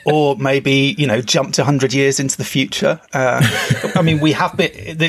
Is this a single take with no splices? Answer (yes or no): yes